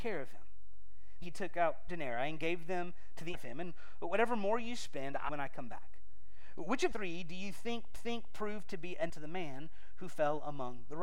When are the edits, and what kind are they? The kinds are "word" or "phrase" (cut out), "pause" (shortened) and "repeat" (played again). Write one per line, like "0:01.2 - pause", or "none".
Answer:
0:01.2 - phrase
0:01.9 - word
0:03.3 - phrase
0:05.3 - phrase
0:06.9 - word
0:07.9 - repeat
0:09.1 - word